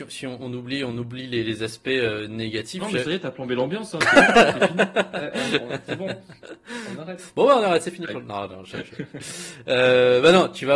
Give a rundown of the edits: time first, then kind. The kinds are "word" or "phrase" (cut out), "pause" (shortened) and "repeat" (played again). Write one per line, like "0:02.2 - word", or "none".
none